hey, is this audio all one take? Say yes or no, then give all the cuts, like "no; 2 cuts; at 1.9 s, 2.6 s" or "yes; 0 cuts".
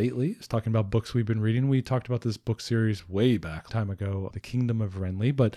no; 2 cuts; at 3.7 s, 4.3 s